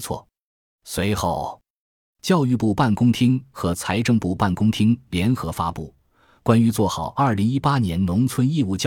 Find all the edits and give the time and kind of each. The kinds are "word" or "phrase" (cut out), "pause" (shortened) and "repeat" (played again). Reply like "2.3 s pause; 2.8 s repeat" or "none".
none